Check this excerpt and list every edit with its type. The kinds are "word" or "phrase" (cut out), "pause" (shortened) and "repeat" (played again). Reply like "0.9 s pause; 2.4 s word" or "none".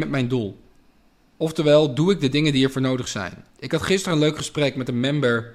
1.1 s pause; 3.5 s pause